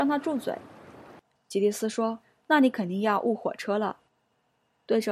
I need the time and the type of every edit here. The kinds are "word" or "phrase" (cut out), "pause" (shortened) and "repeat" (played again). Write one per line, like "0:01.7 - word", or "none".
0:02.2 - pause
0:04.1 - pause

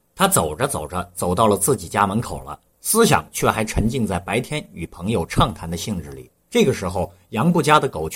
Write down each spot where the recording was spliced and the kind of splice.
0:06.4 - pause

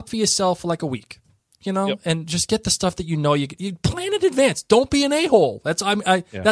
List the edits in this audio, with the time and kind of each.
none

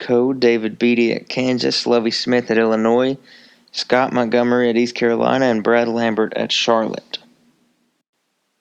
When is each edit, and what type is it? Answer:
none

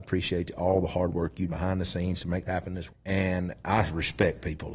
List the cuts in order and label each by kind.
0:01.5 - word
0:02.5 - word
0:02.9 - word

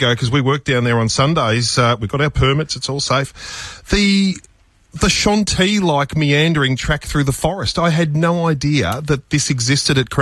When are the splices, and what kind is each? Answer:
none

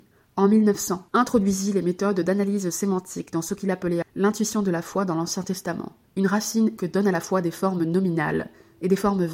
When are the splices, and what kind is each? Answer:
0:01.1 - pause
0:04.0 - word
0:06.0 - pause
0:06.8 - word

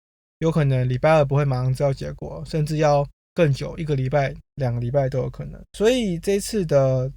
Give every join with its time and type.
0:03.2 - pause
0:05.7 - pause

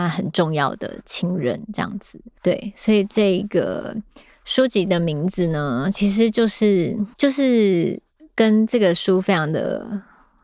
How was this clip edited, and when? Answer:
0:02.4 - pause
0:07.1 - pause

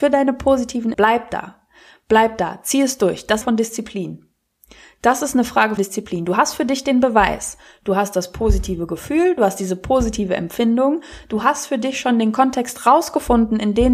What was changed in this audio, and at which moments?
0:00.9 - word
0:03.4 - phrase
0:05.8 - word

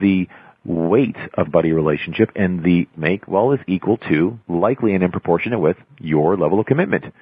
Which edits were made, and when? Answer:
0:01.5 - phrase
0:02.9 - phrase
0:04.4 - pause

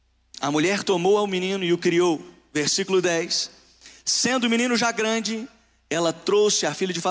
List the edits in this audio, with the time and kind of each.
none

